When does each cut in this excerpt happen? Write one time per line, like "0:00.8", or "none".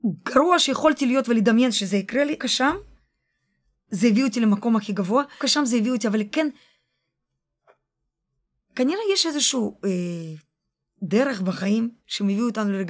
0:02.4
0:05.4